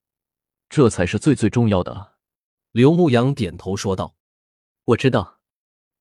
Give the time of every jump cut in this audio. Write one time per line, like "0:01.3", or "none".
0:02.5
0:04.2